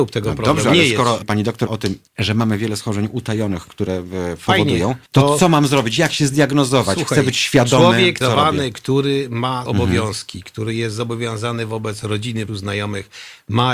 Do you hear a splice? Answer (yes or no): yes